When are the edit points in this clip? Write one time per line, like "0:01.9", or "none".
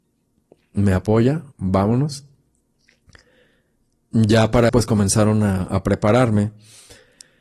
0:01.5
0:04.7